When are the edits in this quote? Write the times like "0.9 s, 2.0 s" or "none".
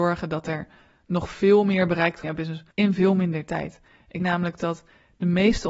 2.2 s, 2.7 s, 4.2 s